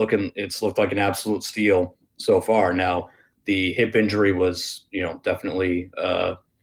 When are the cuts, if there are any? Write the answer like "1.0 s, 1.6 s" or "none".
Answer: none